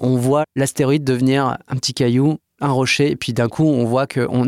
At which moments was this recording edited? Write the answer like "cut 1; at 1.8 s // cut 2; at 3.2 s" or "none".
none